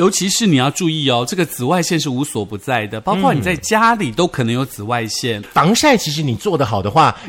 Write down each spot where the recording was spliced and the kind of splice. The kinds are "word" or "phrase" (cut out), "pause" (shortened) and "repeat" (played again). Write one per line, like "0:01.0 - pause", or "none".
0:05.4 - word